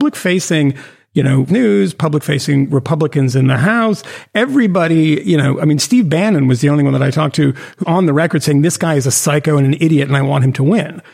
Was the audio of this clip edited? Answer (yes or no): yes